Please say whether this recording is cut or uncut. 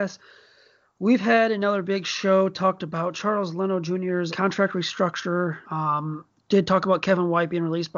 cut